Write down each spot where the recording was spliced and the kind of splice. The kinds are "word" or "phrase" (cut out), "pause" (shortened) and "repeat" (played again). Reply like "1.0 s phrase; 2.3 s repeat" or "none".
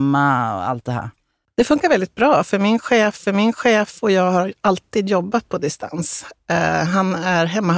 3.3 s repeat